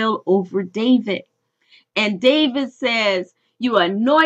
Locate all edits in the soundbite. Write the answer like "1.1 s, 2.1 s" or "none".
none